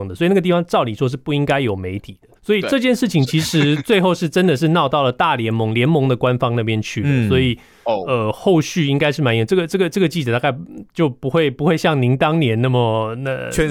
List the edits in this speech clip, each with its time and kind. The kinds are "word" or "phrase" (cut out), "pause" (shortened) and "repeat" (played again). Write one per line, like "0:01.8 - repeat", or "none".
0:02.4 - pause